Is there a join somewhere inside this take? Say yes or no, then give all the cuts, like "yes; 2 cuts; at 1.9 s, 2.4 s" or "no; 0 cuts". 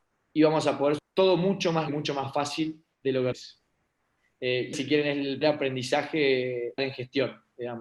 yes; 6 cuts; at 1.0 s, 1.9 s, 3.3 s, 4.7 s, 5.4 s, 6.8 s